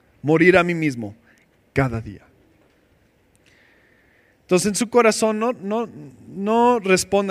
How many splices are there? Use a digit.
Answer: 0